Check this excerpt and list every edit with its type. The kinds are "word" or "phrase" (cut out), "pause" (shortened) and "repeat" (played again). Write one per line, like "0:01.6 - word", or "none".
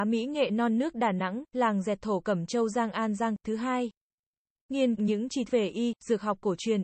0:05.0 - phrase
0:05.5 - word